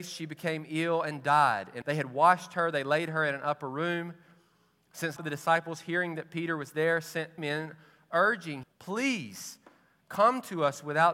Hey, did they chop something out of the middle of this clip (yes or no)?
yes